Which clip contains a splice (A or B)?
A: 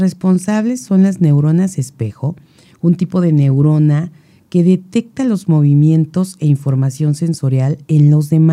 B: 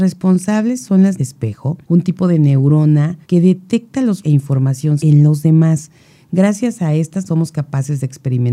B